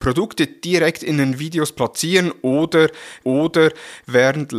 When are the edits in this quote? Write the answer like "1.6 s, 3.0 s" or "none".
3.2 s

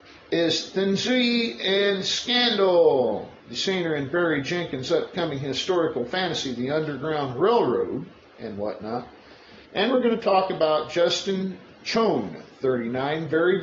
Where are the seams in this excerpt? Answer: 3.4 s, 8.2 s, 9.7 s

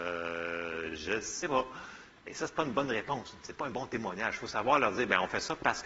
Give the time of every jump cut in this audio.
none

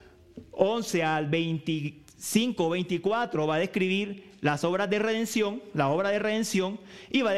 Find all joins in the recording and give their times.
none

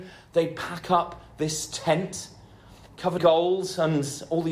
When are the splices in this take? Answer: 3.2 s

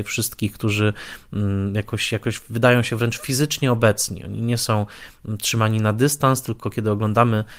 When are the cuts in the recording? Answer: none

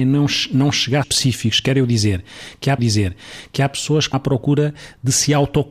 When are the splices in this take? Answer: 1.0 s, 2.8 s, 4.1 s

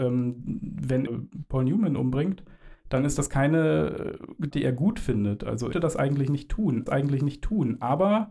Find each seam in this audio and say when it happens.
1.1 s, 2.8 s, 4.5 s, 5.7 s, 6.9 s

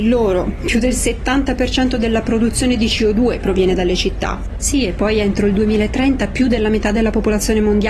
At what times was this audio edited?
none

